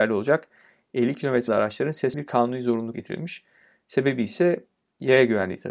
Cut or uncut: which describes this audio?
cut